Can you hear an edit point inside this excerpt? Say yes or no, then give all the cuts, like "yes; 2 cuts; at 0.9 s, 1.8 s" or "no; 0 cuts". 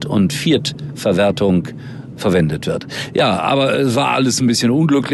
yes; 1 cut; at 2.1 s